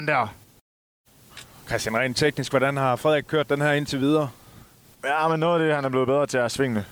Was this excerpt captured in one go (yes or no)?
yes